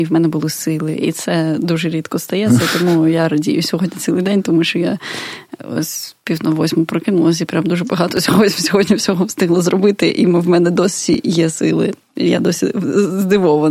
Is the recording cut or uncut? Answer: uncut